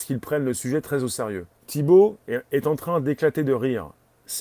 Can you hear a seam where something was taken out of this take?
yes; 1 cut; at 1.5 s

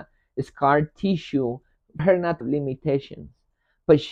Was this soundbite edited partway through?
yes; 2 cuts; at 2.0 s, 2.4 s

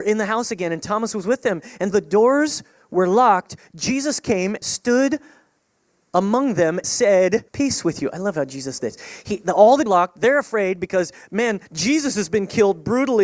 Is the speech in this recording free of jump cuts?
no; 7 cuts; at 1.9 s, 4.6 s, 6.8 s, 7.5 s, 8.8 s, 9.9 s, 11.7 s

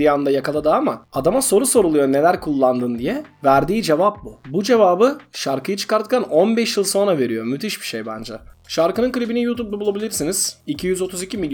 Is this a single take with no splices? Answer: yes; 0 cuts

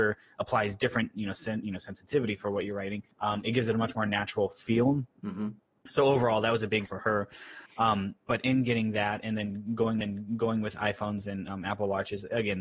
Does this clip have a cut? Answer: yes; 3 cuts; at 3.1 s, 6.9 s, 10.0 s

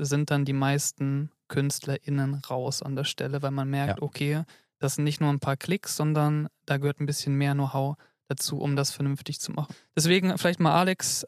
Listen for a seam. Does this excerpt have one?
no; 0 cuts

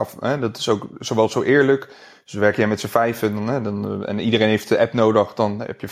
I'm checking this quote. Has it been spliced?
no; 0 cuts

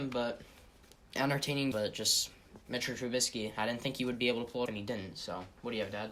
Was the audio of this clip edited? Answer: yes; 3 cuts; at 1.2 s, 1.7 s, 4.7 s

